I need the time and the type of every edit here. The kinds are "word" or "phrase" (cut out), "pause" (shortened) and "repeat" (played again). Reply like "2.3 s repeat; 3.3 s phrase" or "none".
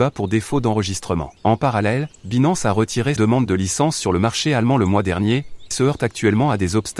1.4 s pause; 2.2 s pause; 3.2 s word; 5.7 s word